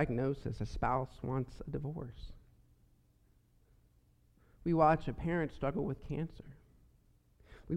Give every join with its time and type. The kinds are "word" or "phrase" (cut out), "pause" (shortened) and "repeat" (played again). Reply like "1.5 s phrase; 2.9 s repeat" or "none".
none